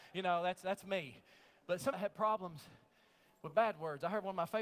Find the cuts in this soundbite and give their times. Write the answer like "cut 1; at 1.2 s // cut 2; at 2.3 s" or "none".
cut 1; at 1.9 s